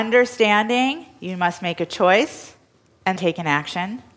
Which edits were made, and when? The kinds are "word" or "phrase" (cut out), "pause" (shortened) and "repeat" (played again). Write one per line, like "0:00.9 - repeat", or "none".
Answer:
0:03.2 - word